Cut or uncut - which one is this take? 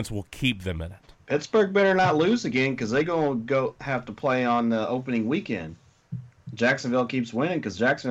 cut